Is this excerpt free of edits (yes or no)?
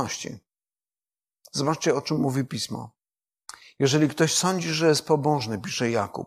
yes